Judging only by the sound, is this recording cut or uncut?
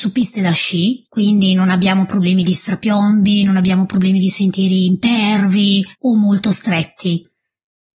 cut